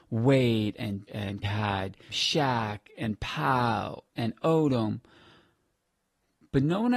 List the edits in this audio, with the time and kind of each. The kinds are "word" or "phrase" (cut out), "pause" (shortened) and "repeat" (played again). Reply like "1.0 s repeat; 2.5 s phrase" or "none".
1.1 s word; 1.4 s word; 2.1 s word; 4.1 s word